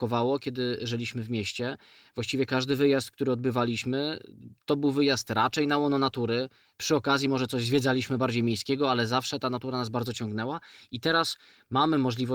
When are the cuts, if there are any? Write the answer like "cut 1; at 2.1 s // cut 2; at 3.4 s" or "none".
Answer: none